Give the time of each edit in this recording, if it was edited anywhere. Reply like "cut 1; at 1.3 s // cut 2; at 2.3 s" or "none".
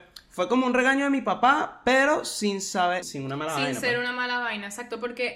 cut 1; at 3.0 s